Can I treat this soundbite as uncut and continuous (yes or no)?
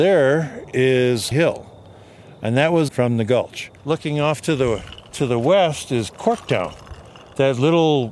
no